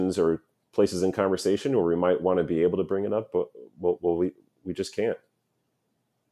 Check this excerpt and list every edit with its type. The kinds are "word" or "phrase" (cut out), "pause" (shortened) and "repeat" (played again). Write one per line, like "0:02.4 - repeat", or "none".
none